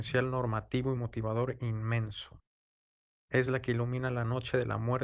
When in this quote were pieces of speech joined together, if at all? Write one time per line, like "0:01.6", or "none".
none